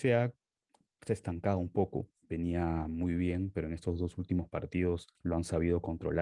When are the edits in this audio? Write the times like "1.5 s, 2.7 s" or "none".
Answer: 2.2 s, 5.1 s

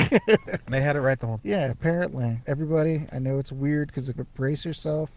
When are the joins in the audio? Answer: 1.4 s, 2.4 s, 4.2 s

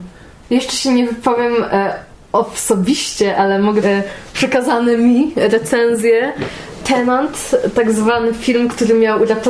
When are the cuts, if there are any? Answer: 3.8 s

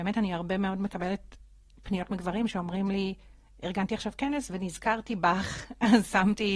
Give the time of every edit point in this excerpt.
none

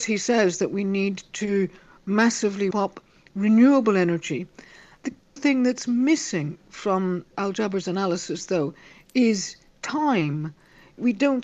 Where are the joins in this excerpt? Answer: 2.7 s, 5.4 s, 7.3 s

